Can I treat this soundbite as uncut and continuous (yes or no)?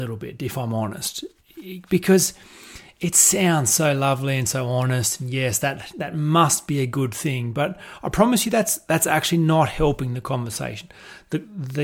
yes